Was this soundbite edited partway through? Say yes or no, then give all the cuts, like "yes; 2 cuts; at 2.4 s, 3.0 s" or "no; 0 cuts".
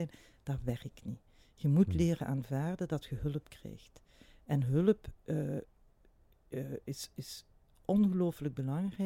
no; 0 cuts